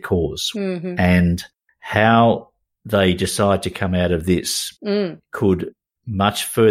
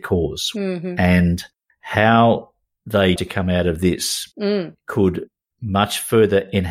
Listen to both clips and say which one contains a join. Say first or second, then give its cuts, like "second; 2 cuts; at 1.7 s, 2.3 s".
second; 1 cut; at 3.2 s